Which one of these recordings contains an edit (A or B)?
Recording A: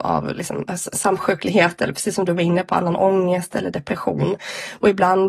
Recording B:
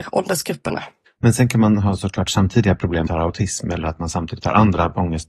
B